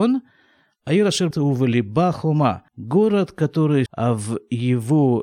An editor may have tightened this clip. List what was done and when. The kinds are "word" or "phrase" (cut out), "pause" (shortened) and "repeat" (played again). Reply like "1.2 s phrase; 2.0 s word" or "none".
1.3 s phrase; 2.7 s pause; 3.9 s phrase